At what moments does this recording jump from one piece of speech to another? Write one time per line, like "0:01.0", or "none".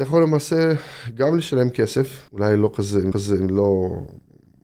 0:02.3
0:03.1